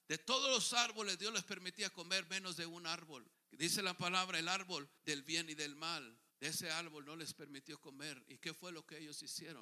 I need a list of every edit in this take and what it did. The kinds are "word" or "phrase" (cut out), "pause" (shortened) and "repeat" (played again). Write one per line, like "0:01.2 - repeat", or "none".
0:03.3 - pause
0:05.0 - pause
0:06.3 - pause